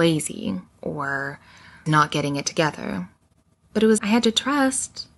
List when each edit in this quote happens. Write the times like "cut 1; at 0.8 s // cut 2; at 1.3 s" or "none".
cut 1; at 1.9 s // cut 2; at 4.0 s